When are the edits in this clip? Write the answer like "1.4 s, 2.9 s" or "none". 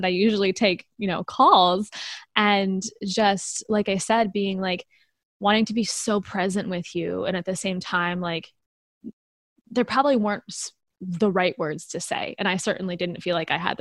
none

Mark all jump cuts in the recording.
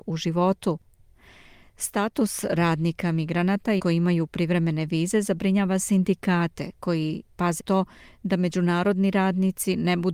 3.8 s, 7.6 s

